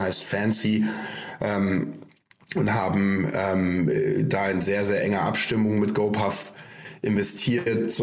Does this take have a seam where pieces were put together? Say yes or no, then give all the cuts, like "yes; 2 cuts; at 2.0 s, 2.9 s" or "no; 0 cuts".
no; 0 cuts